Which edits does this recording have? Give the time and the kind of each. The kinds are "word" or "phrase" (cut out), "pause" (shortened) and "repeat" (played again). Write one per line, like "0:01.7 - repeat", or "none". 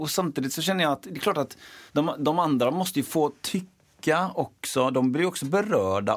0:01.9 - pause